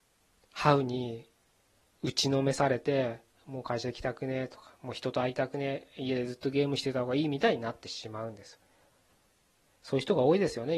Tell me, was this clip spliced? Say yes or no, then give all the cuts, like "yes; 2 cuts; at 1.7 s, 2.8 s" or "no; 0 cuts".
no; 0 cuts